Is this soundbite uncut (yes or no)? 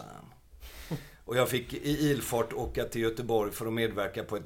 yes